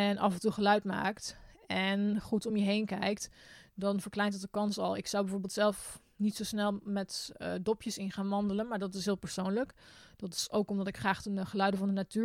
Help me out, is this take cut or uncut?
uncut